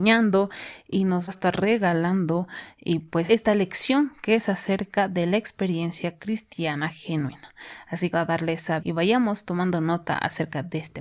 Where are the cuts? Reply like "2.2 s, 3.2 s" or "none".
1.3 s, 3.3 s, 8.1 s, 8.8 s